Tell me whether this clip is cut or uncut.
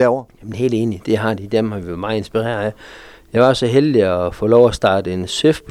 uncut